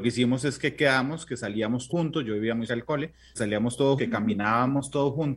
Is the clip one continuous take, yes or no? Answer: no